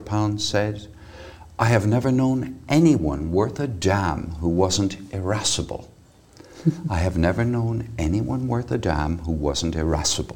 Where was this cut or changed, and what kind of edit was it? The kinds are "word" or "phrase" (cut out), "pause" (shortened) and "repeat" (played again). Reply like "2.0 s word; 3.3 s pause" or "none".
none